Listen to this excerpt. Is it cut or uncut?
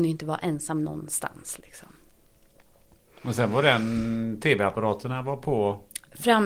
uncut